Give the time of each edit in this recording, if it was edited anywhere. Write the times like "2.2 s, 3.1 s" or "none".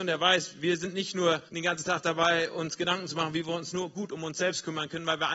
1.5 s